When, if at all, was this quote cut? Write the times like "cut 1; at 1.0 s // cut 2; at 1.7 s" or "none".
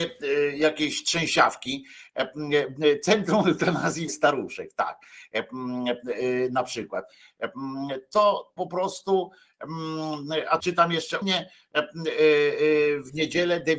cut 1; at 4.1 s // cut 2; at 8.6 s // cut 3; at 10.6 s // cut 4; at 11.2 s